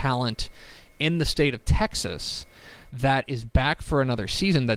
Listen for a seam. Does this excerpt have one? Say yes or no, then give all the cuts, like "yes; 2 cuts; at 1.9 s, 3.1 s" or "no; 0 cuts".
no; 0 cuts